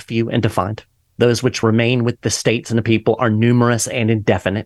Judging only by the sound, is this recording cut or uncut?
uncut